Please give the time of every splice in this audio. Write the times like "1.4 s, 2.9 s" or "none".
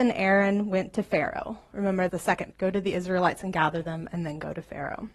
2.1 s, 2.5 s

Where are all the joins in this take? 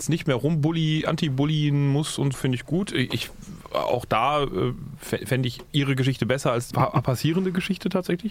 2.3 s, 6.7 s

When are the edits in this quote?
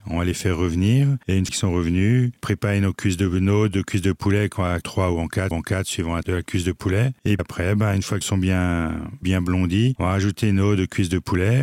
1.5 s, 2.4 s, 4.8 s, 5.5 s, 6.2 s, 7.4 s, 8.2 s, 9.2 s

